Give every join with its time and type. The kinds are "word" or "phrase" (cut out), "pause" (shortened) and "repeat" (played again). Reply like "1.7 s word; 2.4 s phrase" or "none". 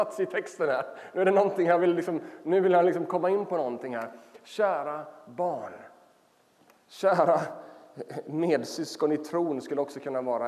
none